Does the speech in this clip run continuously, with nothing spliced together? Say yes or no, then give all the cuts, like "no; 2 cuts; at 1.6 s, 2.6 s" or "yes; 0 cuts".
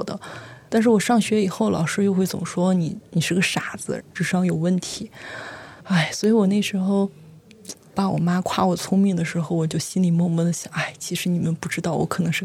no; 1 cut; at 5.8 s